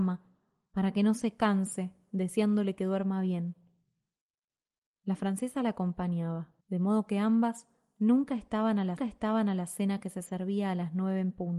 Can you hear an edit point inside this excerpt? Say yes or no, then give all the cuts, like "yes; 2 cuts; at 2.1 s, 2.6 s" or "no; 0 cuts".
yes; 2 cuts; at 6.6 s, 9.0 s